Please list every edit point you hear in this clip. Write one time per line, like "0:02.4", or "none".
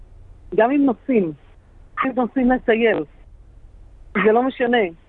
0:02.0